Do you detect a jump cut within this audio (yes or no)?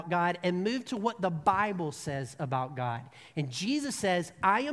no